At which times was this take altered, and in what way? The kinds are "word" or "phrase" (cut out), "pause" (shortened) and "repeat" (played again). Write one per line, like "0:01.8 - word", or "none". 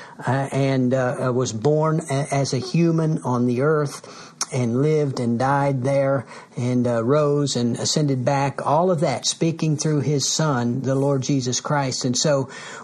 none